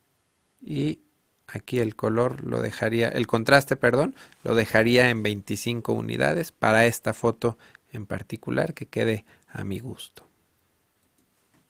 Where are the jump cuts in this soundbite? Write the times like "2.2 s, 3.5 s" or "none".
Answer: none